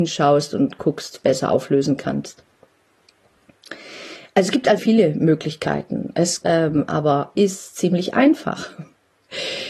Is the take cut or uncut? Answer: cut